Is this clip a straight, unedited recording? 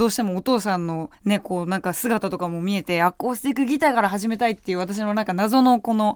no; 1 cut; at 1.1 s

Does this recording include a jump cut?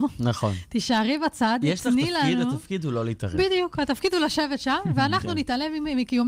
no; 0 cuts

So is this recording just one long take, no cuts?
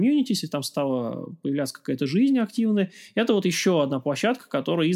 yes; 0 cuts

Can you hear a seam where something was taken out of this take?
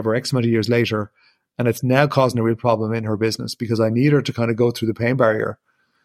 no; 0 cuts

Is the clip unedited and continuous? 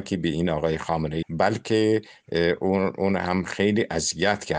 no; 1 cut; at 1.2 s

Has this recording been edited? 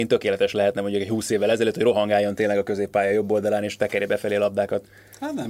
no; 0 cuts

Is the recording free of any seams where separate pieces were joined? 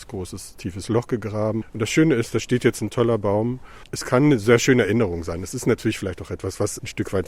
yes; 0 cuts

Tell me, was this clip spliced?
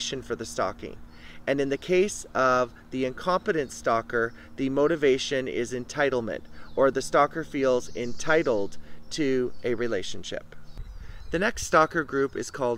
no; 0 cuts

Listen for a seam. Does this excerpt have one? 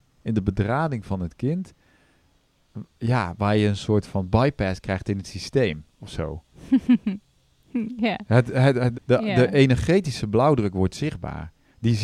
yes; 1 cut; at 8.9 s

